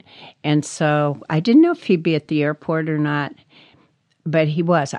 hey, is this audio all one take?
yes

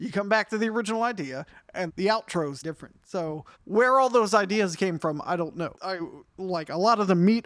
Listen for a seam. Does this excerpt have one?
yes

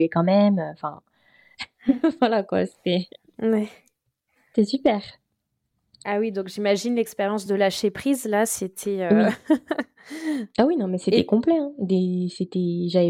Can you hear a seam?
no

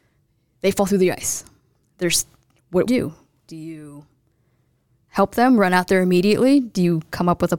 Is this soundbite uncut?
no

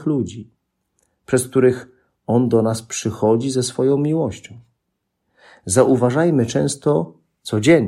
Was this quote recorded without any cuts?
yes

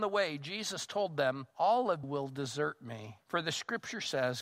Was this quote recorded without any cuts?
no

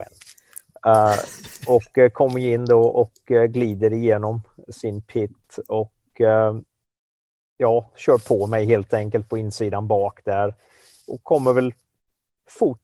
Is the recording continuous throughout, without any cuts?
yes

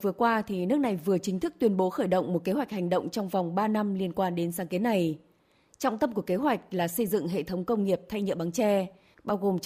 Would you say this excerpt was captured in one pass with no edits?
yes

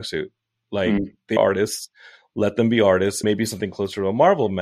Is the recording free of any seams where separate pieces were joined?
no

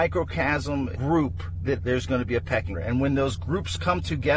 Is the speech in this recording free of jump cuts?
no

